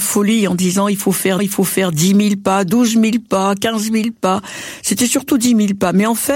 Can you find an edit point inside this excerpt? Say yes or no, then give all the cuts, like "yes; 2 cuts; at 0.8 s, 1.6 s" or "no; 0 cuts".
yes; 1 cut; at 1.4 s